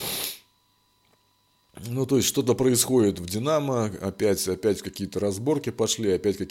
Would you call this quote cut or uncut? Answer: uncut